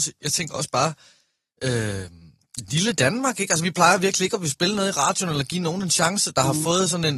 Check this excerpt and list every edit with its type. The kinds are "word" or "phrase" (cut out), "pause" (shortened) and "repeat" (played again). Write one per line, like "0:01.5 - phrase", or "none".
none

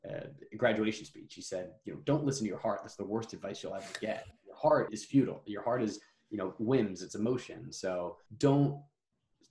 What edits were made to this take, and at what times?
0:04.4 - pause
0:04.9 - word
0:08.3 - pause

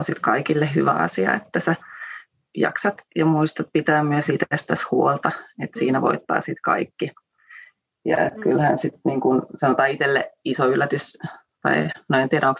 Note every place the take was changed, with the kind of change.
none

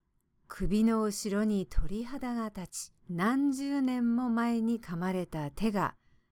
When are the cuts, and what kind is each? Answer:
0:03.0 - pause

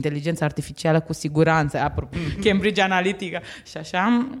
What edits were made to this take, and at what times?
0:02.1 - word

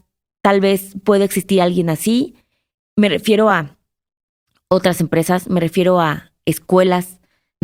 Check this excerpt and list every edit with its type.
none

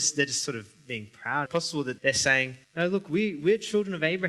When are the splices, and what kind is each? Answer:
0:01.5 - phrase
0:02.0 - word
0:02.6 - pause

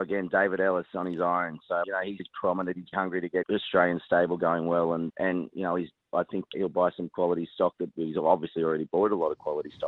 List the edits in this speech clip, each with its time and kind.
0:01.8 - word
0:02.2 - word
0:02.9 - word
0:03.4 - word
0:05.1 - word
0:06.5 - word

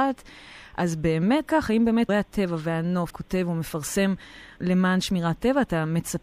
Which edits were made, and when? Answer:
0:01.5 - word
0:02.1 - word
0:03.1 - word
0:04.6 - word

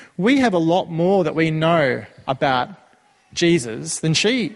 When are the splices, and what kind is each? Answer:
none

